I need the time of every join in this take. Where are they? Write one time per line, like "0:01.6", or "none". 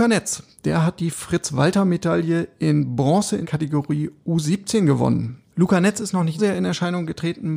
0:03.4
0:05.5
0:06.4